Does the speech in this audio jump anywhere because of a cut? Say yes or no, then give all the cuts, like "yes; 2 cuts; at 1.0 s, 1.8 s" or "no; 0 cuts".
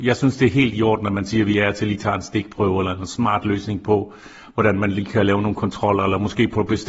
no; 0 cuts